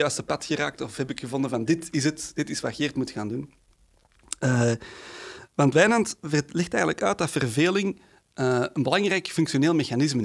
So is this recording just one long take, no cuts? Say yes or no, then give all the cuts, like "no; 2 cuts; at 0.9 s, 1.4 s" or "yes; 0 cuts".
yes; 0 cuts